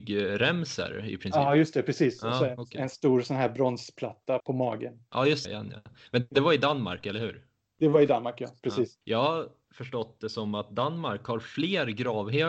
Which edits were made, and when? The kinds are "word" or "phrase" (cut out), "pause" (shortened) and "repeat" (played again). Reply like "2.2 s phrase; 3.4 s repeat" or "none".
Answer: 4.4 s word; 5.4 s phrase; 9.0 s pause; 9.7 s word